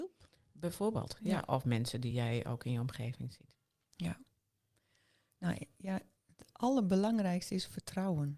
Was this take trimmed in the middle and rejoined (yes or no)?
no